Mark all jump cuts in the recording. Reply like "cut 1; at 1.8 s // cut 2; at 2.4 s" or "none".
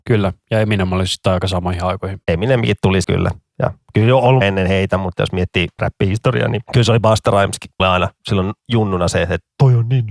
cut 1; at 3.0 s // cut 2; at 4.4 s // cut 3; at 5.8 s // cut 4; at 7.8 s